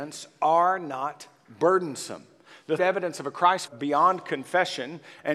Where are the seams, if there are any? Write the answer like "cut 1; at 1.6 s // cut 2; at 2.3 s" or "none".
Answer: cut 1; at 2.8 s // cut 2; at 3.7 s